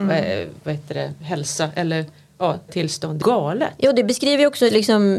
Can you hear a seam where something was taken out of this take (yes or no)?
yes